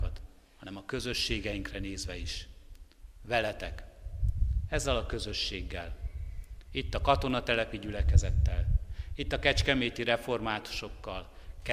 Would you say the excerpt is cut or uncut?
uncut